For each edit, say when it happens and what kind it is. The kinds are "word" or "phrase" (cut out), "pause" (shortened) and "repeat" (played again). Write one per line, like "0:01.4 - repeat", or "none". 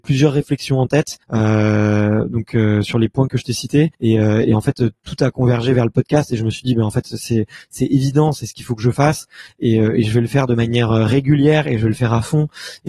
0:01.2 - pause
0:03.9 - pause